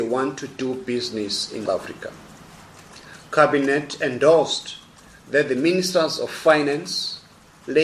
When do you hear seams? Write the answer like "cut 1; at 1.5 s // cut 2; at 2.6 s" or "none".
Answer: cut 1; at 1.7 s